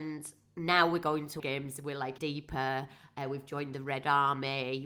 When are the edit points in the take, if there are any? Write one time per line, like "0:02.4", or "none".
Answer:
0:01.4
0:02.2